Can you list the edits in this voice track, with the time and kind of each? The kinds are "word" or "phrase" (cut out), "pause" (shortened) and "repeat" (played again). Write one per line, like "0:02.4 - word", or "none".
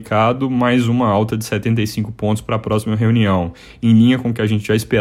none